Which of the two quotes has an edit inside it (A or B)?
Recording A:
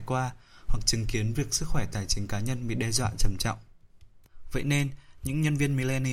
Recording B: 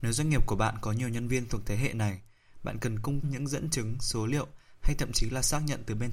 B